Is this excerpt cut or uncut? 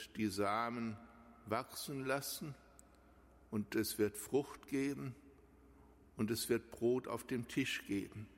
uncut